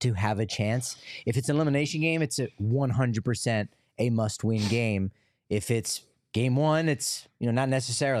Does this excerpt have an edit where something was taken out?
no; 0 cuts

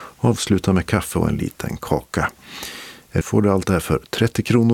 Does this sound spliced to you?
yes; 1 cut; at 3.2 s

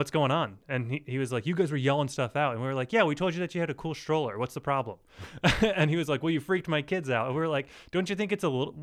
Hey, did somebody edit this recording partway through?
no; 0 cuts

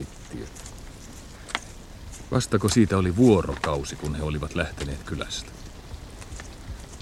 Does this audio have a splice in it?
no; 0 cuts

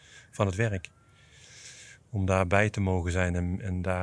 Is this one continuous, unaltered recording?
yes; 0 cuts

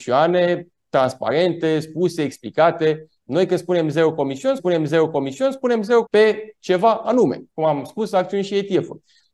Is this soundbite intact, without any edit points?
no; 3 cuts; at 4.6 s, 6.1 s, 7.5 s

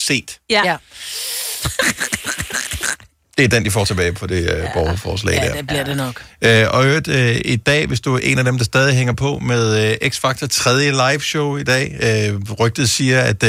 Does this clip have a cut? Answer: no; 0 cuts

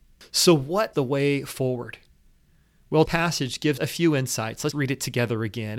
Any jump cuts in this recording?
yes; 4 cuts; at 0.9 s, 3.0 s, 3.8 s, 4.7 s

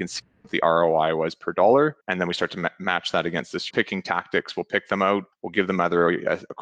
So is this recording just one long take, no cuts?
no; 3 cuts; at 2.0 s, 3.7 s, 5.3 s

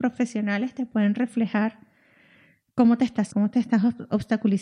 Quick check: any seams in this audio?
yes; 1 cut; at 3.3 s

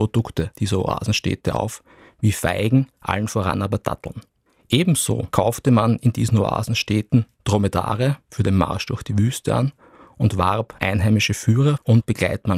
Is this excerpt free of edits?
yes; 0 cuts

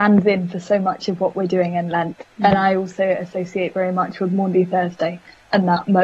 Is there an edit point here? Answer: yes; 1 cut; at 2.3 s

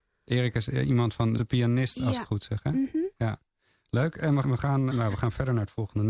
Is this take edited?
yes; 4 cuts; at 1.4 s, 2.3 s, 4.4 s, 4.9 s

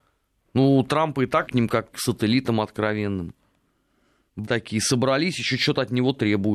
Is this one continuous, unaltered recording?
no; 3 cuts; at 1.5 s, 1.9 s, 4.5 s

